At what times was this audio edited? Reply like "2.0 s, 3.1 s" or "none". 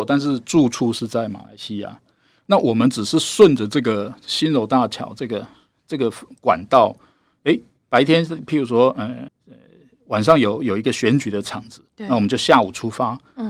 9.3 s